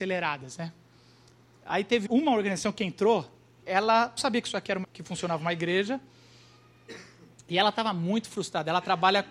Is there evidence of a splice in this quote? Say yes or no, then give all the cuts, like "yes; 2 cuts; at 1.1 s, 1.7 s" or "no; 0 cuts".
yes; 4 cuts; at 2.0 s, 3.6 s, 4.2 s, 4.8 s